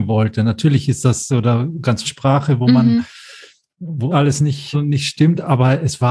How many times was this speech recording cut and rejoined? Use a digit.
4